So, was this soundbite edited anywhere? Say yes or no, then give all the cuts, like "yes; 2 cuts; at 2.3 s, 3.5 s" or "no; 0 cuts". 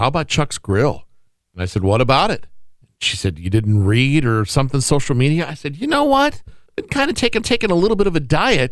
yes; 3 cuts; at 2.8 s, 6.7 s, 7.4 s